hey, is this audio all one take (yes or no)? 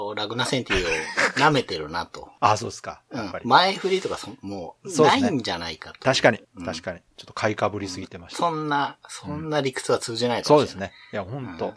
no